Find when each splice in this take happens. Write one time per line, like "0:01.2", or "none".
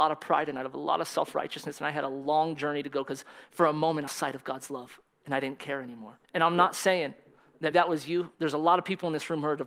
0:04.1
0:06.2
0:07.7
0:08.3